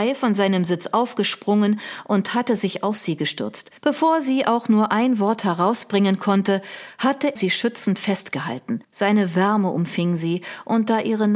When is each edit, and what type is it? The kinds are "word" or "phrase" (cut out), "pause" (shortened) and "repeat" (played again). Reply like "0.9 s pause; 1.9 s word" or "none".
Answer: 3.8 s pause; 7.4 s word; 8.8 s pause